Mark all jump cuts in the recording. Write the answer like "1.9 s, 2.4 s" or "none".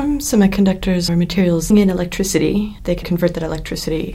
1.1 s, 1.7 s, 3.0 s